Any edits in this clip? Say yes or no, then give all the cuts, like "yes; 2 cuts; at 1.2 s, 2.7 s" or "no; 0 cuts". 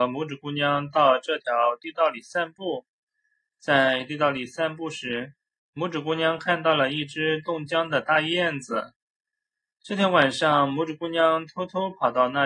no; 0 cuts